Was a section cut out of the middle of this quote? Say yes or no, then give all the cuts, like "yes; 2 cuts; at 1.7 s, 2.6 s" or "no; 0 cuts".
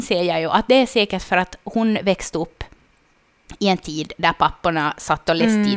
no; 0 cuts